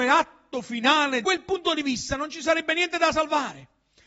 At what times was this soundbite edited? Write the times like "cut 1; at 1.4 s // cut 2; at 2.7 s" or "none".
cut 1; at 1.2 s

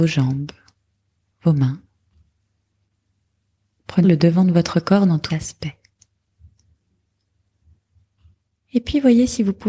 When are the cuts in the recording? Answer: cut 1; at 4.0 s // cut 2; at 5.3 s

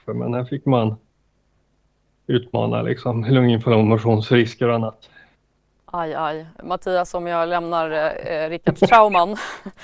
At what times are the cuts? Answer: none

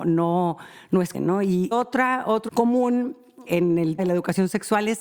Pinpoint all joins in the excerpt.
cut 1; at 1.1 s // cut 2; at 1.7 s // cut 3; at 2.5 s // cut 4; at 3.5 s // cut 5; at 4.0 s

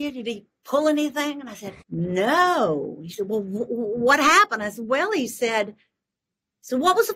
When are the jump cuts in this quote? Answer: cut 1; at 1.8 s

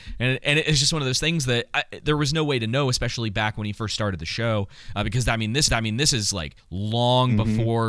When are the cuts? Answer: cut 1; at 5.7 s // cut 2; at 6.6 s

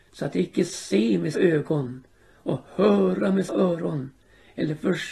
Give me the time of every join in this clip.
cut 1; at 1.3 s // cut 2; at 3.5 s

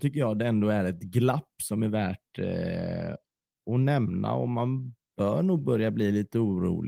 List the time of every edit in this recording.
none

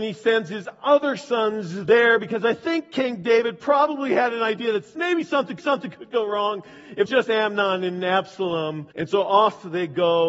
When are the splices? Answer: cut 1; at 5.6 s // cut 2; at 7.1 s // cut 3; at 8.9 s

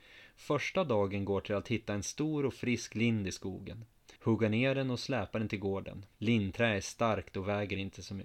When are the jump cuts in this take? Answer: cut 1; at 4.2 s // cut 2; at 6.1 s

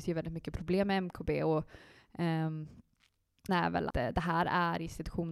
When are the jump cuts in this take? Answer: cut 1; at 3.5 s // cut 2; at 3.9 s

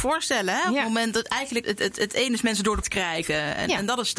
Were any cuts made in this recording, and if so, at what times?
cut 1; at 1.6 s // cut 2; at 2.8 s

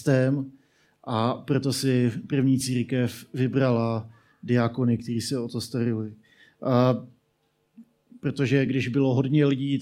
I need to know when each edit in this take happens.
none

